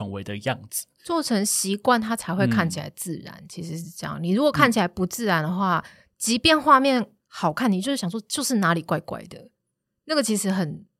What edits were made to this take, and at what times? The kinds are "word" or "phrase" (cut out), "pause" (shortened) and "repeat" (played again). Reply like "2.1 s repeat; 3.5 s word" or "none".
none